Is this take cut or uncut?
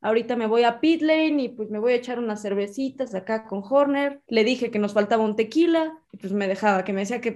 uncut